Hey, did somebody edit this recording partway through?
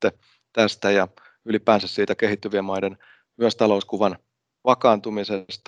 no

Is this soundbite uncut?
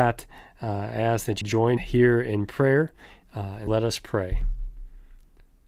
no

